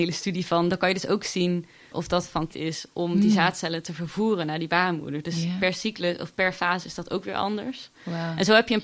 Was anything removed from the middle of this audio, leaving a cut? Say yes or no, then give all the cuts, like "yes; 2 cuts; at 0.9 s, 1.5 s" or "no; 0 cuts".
yes; 2 cuts; at 1.9 s, 2.5 s